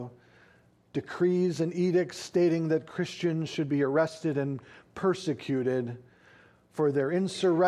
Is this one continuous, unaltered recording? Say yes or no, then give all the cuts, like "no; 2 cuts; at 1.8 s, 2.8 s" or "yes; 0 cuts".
yes; 0 cuts